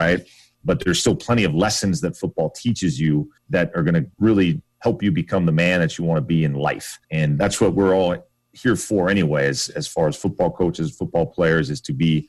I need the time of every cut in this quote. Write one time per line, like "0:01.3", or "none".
0:03.4
0:04.1
0:07.0